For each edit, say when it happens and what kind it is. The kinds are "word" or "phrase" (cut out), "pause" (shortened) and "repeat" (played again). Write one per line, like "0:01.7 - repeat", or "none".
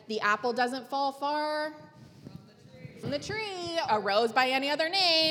0:03.0 - word
0:03.9 - word

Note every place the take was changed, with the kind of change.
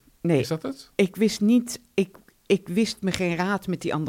none

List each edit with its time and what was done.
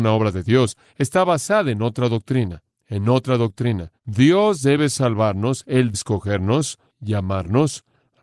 0:04.0 - pause
0:05.9 - word

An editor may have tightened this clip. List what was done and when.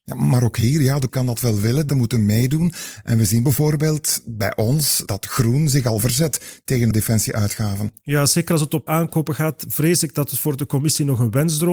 0:01.1 - word
0:01.9 - word
0:05.1 - word
0:06.9 - word
0:08.9 - word

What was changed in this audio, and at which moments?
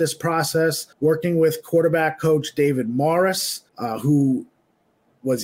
0:00.9 - pause
0:03.7 - pause

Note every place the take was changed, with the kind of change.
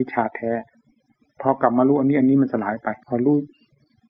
0:03.0 - pause

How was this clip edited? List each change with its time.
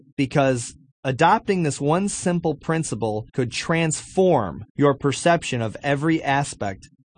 0:03.3 - pause
0:04.7 - pause

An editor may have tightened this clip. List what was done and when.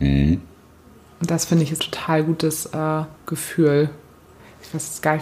0:01.8 - phrase
0:03.2 - pause

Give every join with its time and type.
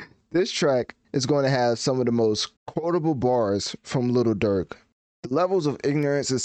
0:01.0 - pause
0:02.6 - pause

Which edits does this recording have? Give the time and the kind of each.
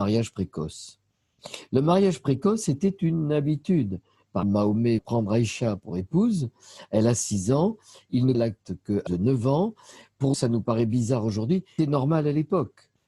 0:04.4 - word
0:05.0 - word
0:08.3 - word
0:09.1 - word
0:10.3 - word
0:11.8 - word

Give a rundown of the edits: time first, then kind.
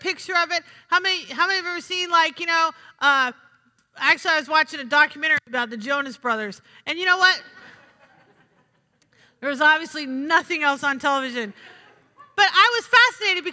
none

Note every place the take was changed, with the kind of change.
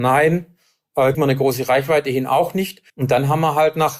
0:01.1 - word
0:02.9 - pause

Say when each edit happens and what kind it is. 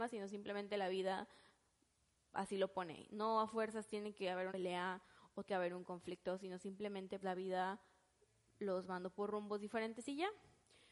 0:04.5 - word
0:05.5 - word
0:07.2 - word

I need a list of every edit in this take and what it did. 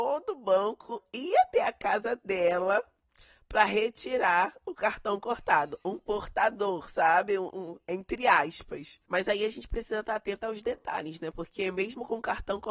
none

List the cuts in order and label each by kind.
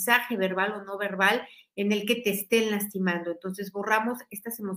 none

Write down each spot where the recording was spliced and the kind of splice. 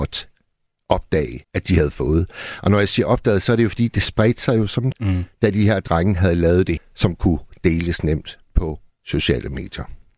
0:01.4 - pause
0:04.9 - word
0:06.8 - word

